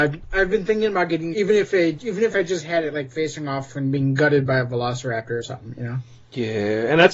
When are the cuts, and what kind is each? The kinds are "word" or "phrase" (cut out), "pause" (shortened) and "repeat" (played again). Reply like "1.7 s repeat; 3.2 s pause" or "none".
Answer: 1.3 s word